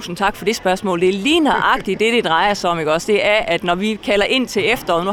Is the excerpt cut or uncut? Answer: uncut